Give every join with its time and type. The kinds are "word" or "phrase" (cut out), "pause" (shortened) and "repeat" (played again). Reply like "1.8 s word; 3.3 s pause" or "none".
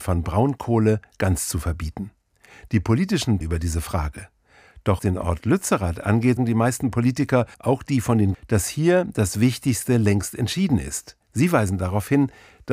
3.4 s phrase; 5.0 s word; 6.4 s word; 7.5 s pause; 8.3 s word; 11.2 s pause